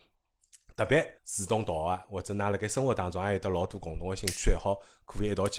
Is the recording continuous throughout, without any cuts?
no; 1 cut; at 1.2 s

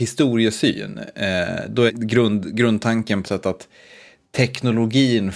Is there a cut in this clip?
yes; 2 cuts; at 1.9 s, 3.2 s

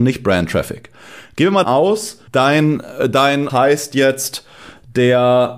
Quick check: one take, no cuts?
no; 3 cuts; at 1.6 s, 2.3 s, 3.5 s

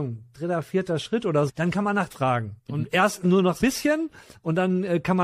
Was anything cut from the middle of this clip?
yes; 4 cuts; at 1.5 s, 2.1 s, 2.6 s, 3.6 s

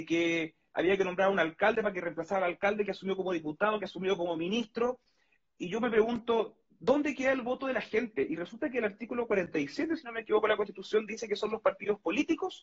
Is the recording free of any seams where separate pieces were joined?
yes; 0 cuts

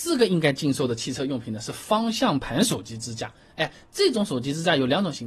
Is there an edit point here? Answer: no; 0 cuts

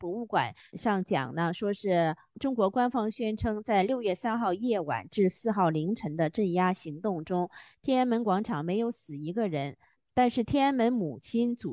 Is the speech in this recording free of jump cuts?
yes; 0 cuts

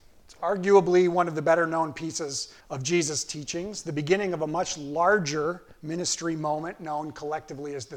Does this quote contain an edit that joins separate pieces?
yes; 1 cut; at 2.6 s

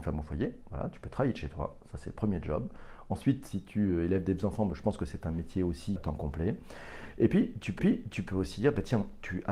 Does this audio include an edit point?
yes; 2 cuts; at 6.0 s, 7.8 s

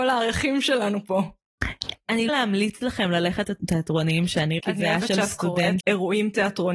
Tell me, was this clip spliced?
yes; 4 cuts; at 2.3 s, 3.4 s, 4.6 s, 5.8 s

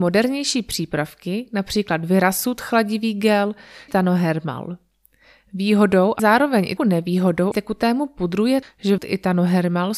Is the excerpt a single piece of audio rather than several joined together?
no; 6 cuts; at 3.9 s, 6.2 s, 6.8 s, 7.5 s, 8.6 s, 9.0 s

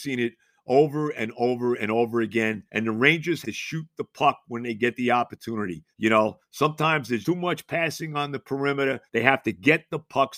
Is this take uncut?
no; 5 cuts; at 2.7 s, 3.4 s, 5.9 s, 7.2 s, 9.1 s

